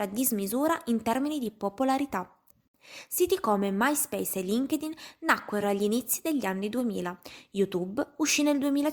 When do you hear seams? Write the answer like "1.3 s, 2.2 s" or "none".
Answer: none